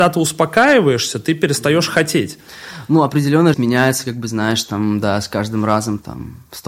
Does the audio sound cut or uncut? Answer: cut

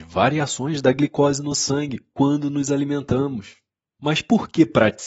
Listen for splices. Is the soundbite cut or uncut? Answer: uncut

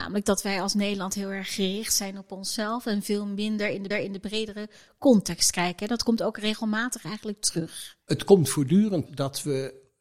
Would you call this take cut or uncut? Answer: cut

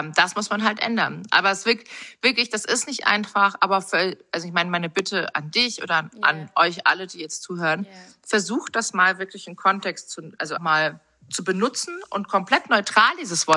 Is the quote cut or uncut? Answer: cut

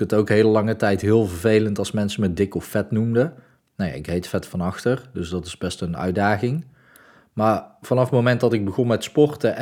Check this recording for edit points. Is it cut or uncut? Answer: uncut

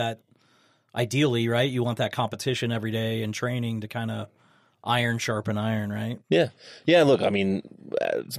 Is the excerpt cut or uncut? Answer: uncut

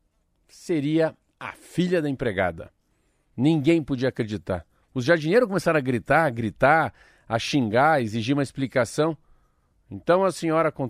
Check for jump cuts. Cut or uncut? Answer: uncut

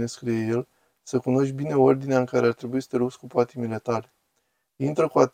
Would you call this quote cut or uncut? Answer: uncut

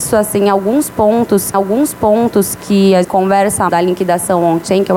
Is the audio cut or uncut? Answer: cut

